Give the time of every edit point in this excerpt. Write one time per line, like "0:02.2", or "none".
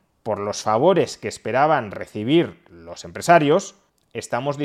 none

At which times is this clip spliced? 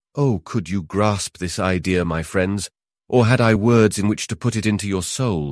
none

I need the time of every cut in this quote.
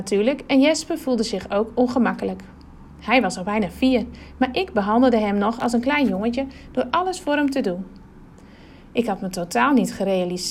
none

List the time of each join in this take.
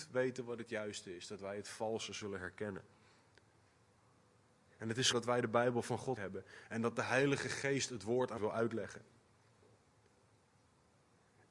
0:05.1
0:06.2
0:08.4

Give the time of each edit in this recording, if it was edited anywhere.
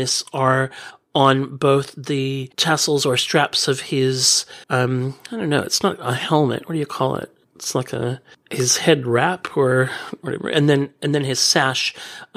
0:04.6

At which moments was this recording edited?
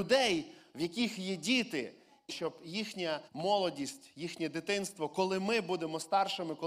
0:02.3
0:03.3

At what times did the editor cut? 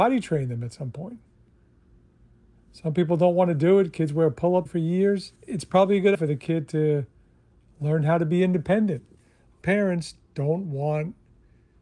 0:04.7
0:05.4
0:06.1
0:09.6

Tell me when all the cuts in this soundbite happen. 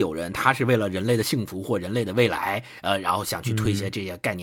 none

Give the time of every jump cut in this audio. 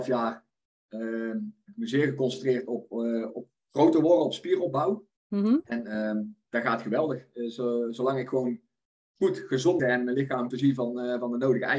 0:05.2
0:09.8
0:10.5

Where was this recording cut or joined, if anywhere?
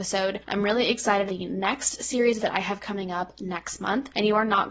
0:01.3
0:02.4

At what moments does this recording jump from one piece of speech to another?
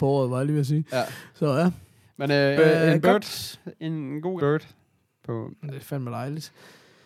0:02.6
0:04.4

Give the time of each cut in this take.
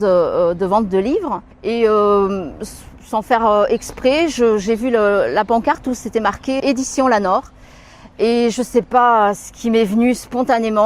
0:01.5
0:03.0
0:06.6

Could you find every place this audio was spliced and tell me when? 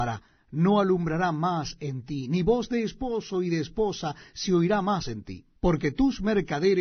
0:05.6

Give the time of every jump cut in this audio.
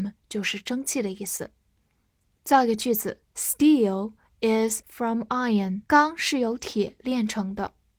0:03.3
0:04.8
0:05.8

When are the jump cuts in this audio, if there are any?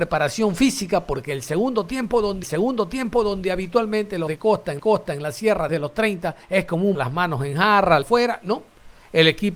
0:02.4
0:04.3
0:04.8
0:05.7
0:06.4
0:06.9
0:08.0

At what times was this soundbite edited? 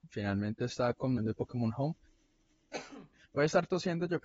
0:01.2

